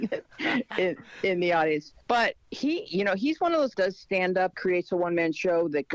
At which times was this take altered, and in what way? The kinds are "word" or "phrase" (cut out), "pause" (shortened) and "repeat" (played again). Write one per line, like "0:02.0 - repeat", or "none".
0:02.0 - pause
0:03.7 - phrase
0:04.5 - phrase